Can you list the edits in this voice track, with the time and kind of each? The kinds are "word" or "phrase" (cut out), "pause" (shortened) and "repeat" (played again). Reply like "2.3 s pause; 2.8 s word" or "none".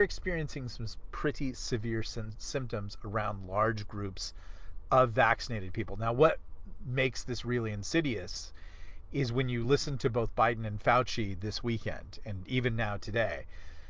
none